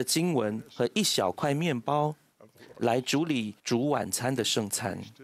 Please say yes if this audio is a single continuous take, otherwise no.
no